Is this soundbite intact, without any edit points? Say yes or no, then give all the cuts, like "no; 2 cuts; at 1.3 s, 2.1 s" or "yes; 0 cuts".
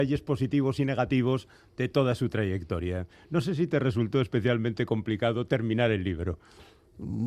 yes; 0 cuts